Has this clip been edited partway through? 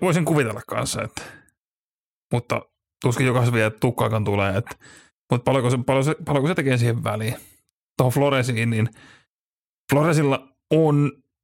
no; 0 cuts

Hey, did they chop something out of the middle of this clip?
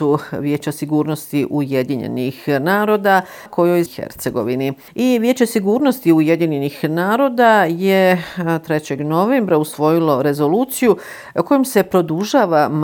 yes; 2 cuts; at 3.5 s, 3.9 s

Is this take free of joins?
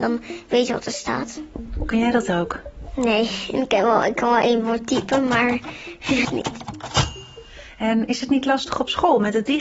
no; 1 cut; at 6.2 s

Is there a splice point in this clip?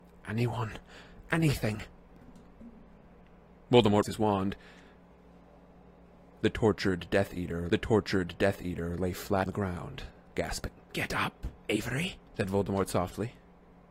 yes; 5 cuts; at 4.0 s, 7.7 s, 9.5 s, 10.8 s, 12.3 s

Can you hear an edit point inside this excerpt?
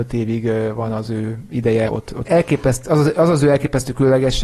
yes; 2 cuts; at 1.9 s, 2.2 s

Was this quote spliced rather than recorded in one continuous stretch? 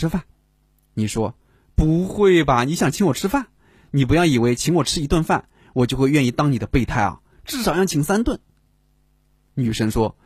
no; 0 cuts

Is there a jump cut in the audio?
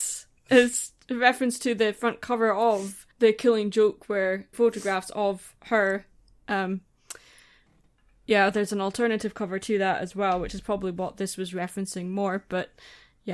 yes; 2 cuts; at 3.1 s, 4.5 s

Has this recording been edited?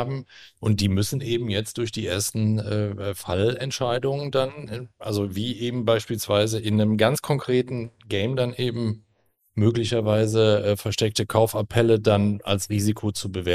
no; 0 cuts

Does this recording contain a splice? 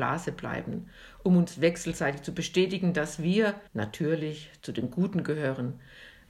yes; 1 cut; at 3.7 s

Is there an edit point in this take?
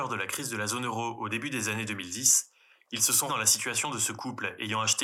yes; 1 cut; at 3.3 s

